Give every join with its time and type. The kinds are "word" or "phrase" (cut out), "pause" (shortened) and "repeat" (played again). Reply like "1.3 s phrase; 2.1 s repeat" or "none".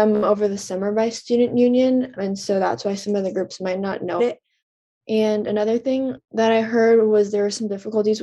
2.2 s word; 4.2 s word